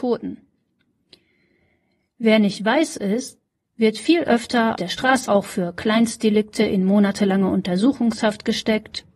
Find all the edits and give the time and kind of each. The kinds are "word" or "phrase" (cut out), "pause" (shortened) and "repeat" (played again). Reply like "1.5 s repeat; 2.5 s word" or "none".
4.8 s word; 5.3 s word